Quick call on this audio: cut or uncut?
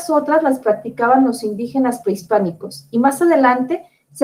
uncut